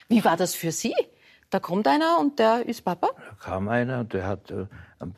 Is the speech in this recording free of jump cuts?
yes; 0 cuts

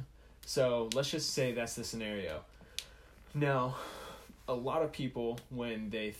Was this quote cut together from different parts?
no; 0 cuts

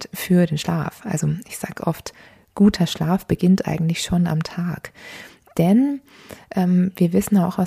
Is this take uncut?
yes; 0 cuts

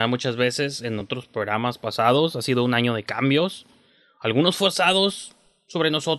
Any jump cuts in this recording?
no; 0 cuts

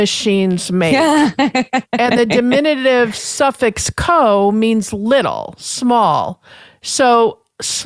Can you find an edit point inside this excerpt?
no; 0 cuts

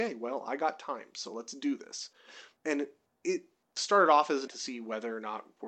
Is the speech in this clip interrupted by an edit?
yes; 1 cut; at 4.5 s

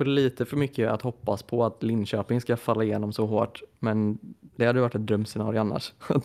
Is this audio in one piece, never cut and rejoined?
yes; 0 cuts

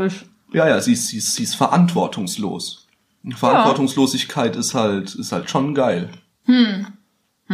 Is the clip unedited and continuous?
yes; 0 cuts

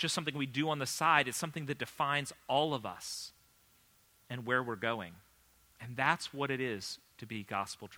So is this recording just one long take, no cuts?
yes; 0 cuts

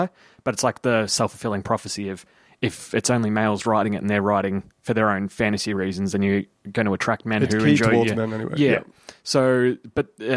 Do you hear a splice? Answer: no; 0 cuts

